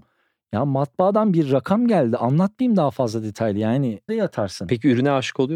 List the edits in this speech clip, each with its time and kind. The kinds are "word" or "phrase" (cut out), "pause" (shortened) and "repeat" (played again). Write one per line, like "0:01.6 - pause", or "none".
0:04.1 - word